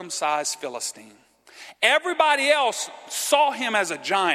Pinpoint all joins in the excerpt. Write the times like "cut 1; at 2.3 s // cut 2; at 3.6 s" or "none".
none